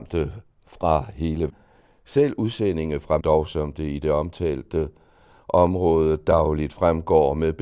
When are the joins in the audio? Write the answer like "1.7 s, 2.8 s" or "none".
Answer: 1.5 s, 3.2 s

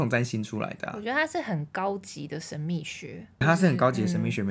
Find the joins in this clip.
3.4 s

